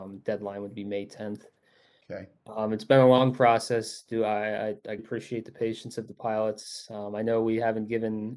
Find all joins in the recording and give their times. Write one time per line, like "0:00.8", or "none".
0:05.0

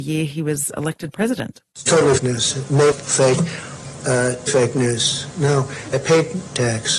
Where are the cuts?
0:02.2
0:02.9
0:04.5
0:05.9

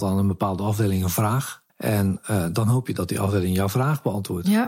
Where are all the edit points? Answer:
0:01.7

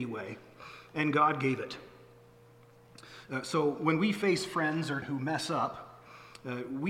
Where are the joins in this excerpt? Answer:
0:05.0

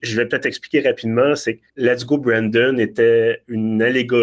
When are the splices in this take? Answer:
0:01.7

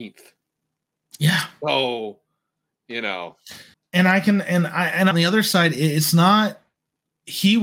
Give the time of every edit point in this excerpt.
0:03.7
0:05.1

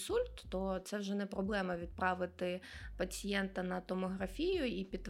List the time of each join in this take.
none

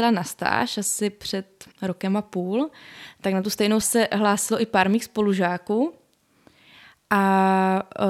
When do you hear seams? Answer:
0:01.7
0:03.8

